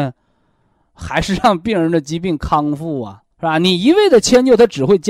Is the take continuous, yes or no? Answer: no